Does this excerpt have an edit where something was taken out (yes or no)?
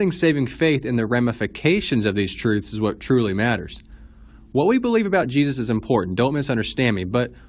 no